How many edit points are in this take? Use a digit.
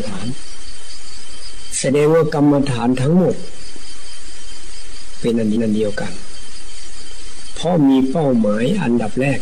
1